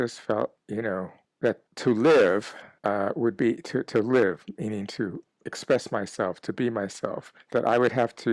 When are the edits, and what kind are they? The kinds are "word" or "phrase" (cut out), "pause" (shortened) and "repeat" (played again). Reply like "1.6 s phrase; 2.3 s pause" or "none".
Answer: 1.7 s pause; 7.4 s pause